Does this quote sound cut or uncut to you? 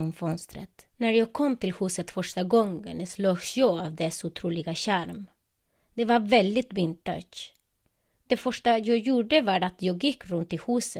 cut